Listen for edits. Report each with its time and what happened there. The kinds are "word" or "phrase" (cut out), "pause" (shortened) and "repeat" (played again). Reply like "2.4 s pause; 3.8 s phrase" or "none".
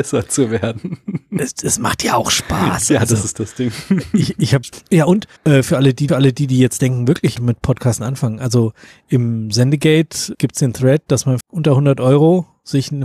5.4 s pause; 6.1 s repeat; 7.4 s phrase; 10.3 s word; 11.4 s word